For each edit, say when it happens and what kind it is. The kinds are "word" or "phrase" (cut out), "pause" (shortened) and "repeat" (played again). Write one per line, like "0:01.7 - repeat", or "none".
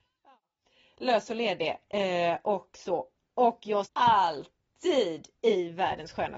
0:03.8 - phrase